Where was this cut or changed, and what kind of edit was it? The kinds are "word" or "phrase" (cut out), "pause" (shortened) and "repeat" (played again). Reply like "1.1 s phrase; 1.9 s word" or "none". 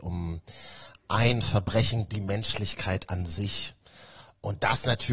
2.1 s word